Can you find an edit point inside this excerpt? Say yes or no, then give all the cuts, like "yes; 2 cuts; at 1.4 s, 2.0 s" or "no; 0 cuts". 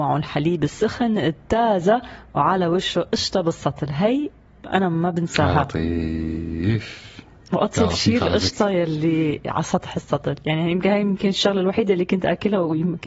no; 0 cuts